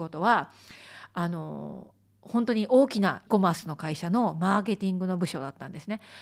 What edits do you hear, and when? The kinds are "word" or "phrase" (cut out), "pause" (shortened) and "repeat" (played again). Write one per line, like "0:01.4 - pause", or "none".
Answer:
0:03.3 - word